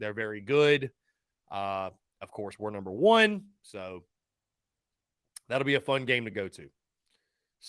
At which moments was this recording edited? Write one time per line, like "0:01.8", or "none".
none